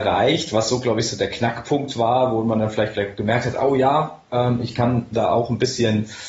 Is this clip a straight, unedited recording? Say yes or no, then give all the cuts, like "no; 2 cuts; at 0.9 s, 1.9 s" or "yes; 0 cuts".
yes; 0 cuts